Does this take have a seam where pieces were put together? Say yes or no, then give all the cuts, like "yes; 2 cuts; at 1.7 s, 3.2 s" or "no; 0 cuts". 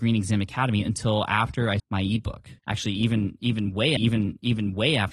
yes; 3 cuts; at 1.8 s, 2.6 s, 4.0 s